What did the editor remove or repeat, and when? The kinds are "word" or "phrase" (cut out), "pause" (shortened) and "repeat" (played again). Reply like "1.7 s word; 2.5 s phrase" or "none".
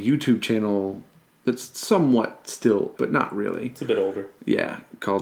2.9 s word